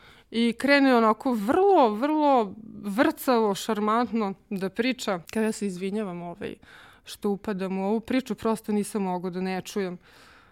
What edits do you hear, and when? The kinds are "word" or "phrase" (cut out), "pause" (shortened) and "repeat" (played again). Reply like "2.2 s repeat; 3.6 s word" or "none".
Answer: 5.2 s pause

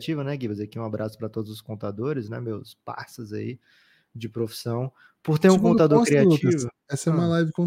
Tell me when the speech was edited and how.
none

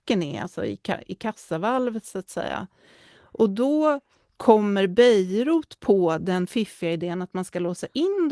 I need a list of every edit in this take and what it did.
none

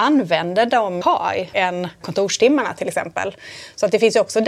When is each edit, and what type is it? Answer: 1.0 s phrase; 1.5 s word; 2.0 s word

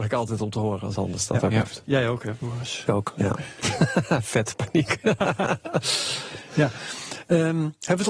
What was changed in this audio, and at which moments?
0.9 s word; 2.9 s word

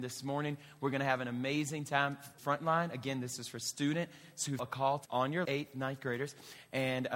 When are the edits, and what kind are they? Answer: 2.4 s word; 4.6 s word; 5.0 s word; 5.4 s phrase

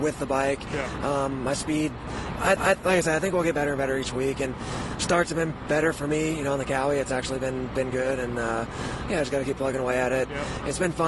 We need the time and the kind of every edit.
2.6 s repeat

